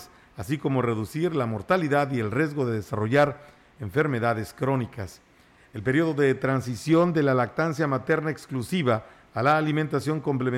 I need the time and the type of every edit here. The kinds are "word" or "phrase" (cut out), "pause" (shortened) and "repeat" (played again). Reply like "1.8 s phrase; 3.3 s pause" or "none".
none